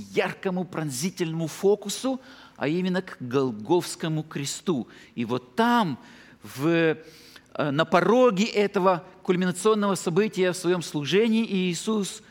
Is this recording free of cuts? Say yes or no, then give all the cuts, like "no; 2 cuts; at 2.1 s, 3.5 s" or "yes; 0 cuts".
yes; 0 cuts